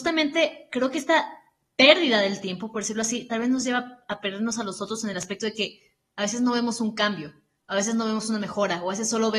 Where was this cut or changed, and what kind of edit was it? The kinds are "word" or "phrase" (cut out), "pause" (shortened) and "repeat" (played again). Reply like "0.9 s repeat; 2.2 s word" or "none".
none